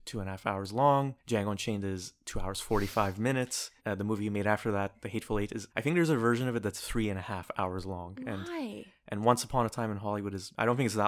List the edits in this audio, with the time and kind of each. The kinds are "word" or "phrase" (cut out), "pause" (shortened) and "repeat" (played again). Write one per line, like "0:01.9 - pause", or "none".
0:03.8 - pause
0:05.7 - pause